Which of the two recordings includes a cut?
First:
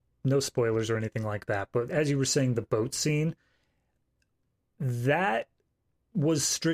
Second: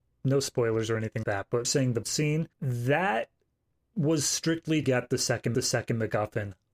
second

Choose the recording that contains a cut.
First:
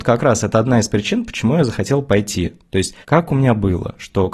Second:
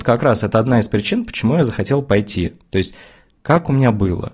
first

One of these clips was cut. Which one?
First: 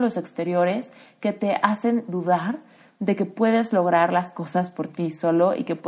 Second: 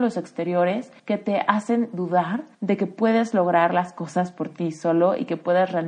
second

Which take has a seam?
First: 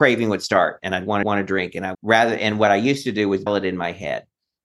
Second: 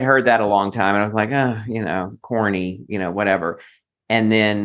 first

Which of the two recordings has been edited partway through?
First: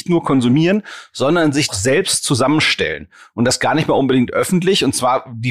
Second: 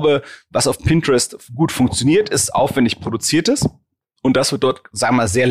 first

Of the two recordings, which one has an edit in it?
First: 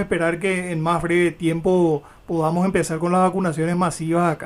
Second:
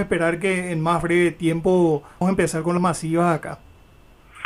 second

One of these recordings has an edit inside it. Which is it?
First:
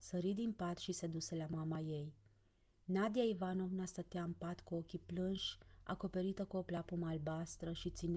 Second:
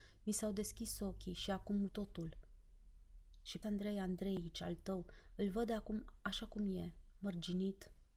second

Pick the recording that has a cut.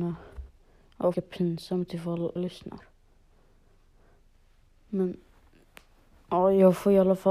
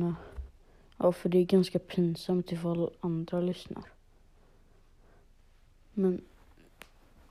first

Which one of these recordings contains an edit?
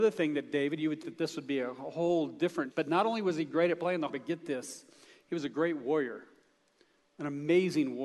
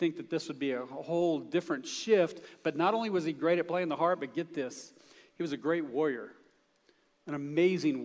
first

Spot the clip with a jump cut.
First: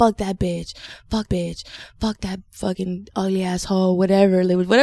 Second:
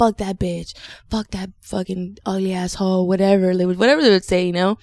first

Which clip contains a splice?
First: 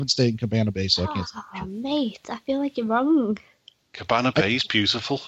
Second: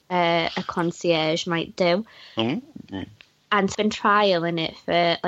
second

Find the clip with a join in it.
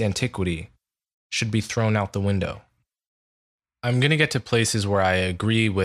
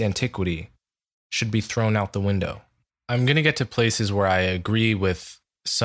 second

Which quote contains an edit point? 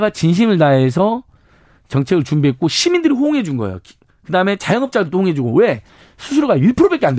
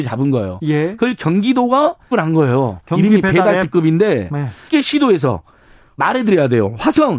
second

